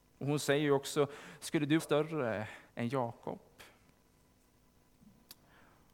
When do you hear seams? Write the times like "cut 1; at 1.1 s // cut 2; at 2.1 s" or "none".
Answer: cut 1; at 1.8 s // cut 2; at 2.7 s